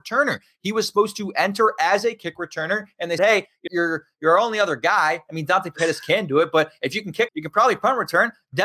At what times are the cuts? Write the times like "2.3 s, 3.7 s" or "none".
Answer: 3.2 s, 3.7 s, 7.3 s

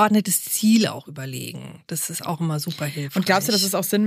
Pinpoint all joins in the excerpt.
none

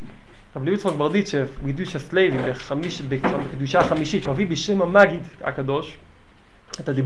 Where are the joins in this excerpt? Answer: 4.3 s

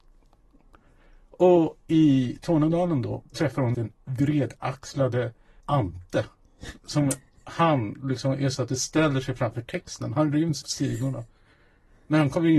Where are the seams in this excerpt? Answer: 3.3 s, 3.7 s, 5.6 s, 8.5 s, 10.6 s

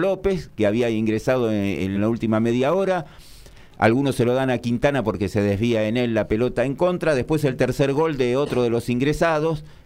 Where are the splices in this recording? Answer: 1.9 s

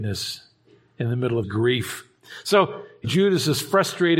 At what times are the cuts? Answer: 1.4 s, 3.0 s

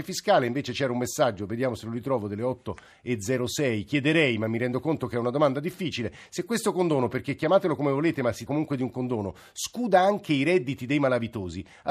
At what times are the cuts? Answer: 8.5 s

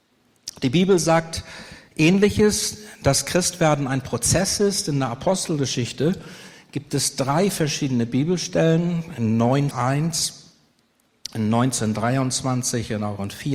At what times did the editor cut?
9.7 s

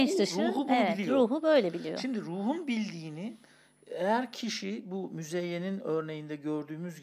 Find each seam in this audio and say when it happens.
none

